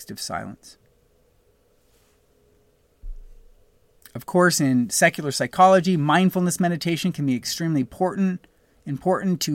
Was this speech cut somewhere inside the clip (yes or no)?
no